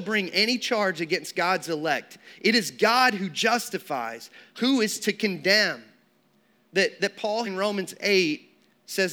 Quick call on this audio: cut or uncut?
cut